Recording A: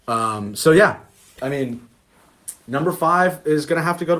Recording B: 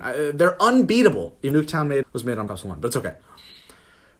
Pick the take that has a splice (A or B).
B